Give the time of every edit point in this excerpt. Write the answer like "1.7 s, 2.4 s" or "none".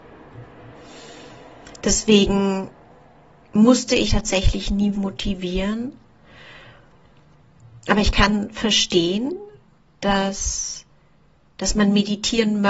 4.1 s, 4.9 s